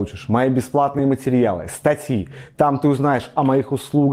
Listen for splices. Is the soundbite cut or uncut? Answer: uncut